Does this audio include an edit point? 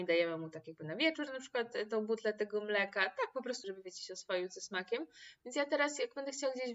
yes; 1 cut; at 3.6 s

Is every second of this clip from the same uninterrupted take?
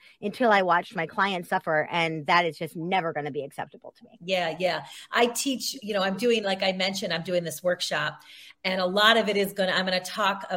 yes; 0 cuts

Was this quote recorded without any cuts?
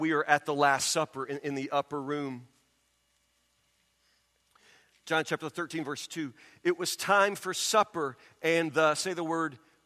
yes; 0 cuts

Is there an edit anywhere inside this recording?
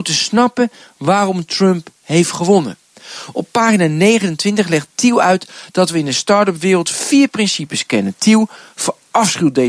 no; 0 cuts

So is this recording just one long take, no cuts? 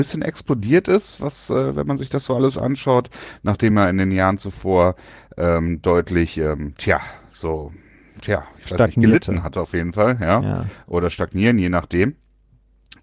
yes; 0 cuts

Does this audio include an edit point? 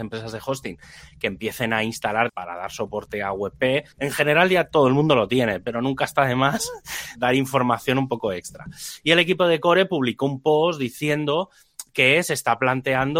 yes; 3 cuts; at 2.3 s, 3.9 s, 7.2 s

